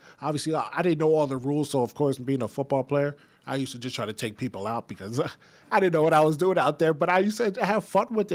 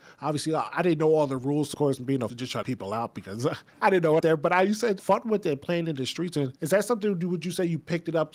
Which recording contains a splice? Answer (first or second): second